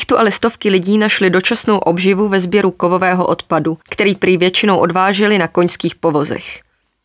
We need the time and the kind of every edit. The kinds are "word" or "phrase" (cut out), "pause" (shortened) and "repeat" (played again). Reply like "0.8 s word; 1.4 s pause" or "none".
3.8 s pause